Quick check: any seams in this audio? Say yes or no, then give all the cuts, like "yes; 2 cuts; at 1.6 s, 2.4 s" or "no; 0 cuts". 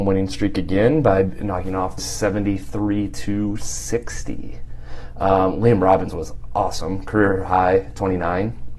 yes; 1 cut; at 2.0 s